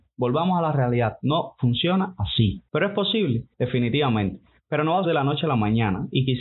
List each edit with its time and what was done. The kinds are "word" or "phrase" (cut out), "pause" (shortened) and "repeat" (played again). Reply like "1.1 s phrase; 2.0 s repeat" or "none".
2.7 s pause; 3.5 s pause; 5.0 s word

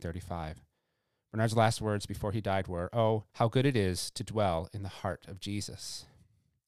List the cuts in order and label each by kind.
3.3 s pause

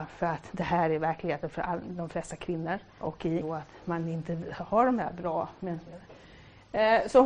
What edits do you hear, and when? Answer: 3.0 s word; 3.4 s word

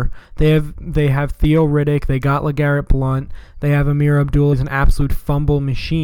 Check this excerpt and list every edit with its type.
4.5 s word

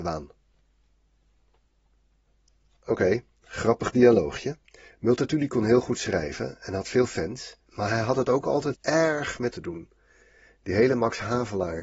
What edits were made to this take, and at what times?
3.3 s pause; 7.6 s pause; 8.7 s word; 9.5 s word

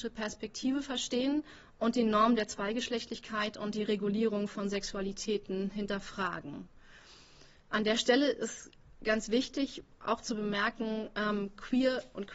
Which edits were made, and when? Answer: none

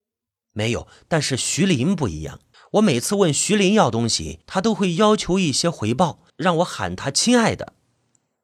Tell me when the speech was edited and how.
2.5 s pause; 4.4 s pause; 6.3 s pause

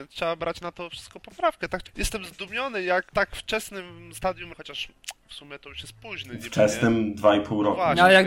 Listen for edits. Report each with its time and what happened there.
1.9 s word; 3.1 s word; 4.5 s word

